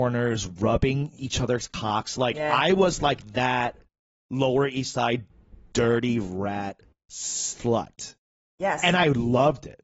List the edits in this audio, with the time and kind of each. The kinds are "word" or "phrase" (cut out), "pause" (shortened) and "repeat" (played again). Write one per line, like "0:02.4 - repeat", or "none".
none